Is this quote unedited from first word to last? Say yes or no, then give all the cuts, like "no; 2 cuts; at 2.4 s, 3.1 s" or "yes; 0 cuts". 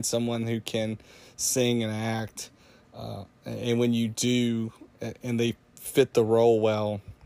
yes; 0 cuts